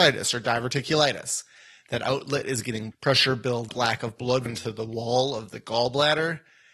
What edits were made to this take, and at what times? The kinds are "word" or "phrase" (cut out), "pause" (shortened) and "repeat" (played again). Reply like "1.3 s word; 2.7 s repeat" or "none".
2.9 s word; 3.7 s word; 4.5 s word